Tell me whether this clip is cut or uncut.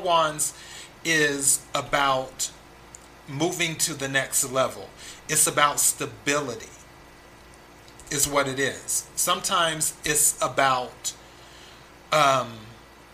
uncut